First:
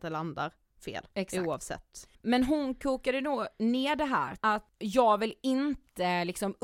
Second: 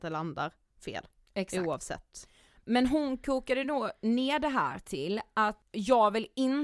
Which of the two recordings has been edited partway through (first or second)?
first